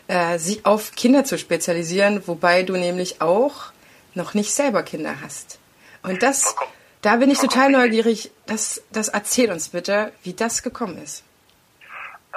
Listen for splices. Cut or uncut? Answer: uncut